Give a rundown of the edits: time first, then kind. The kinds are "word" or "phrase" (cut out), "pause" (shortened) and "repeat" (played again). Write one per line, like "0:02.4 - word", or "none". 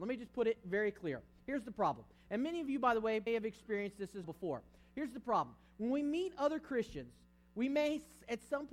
0:03.3 - word
0:04.2 - word